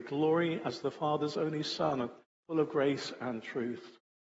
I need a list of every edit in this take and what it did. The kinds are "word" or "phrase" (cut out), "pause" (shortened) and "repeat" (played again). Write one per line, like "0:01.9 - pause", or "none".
none